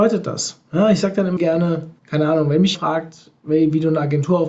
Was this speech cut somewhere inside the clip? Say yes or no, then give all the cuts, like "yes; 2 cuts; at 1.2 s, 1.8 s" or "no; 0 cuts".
yes; 3 cuts; at 1.4 s, 2.0 s, 2.7 s